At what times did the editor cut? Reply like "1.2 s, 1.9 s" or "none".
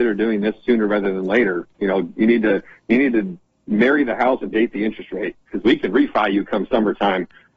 1.7 s